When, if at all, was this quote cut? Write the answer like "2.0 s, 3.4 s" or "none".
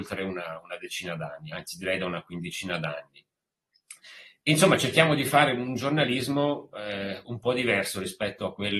none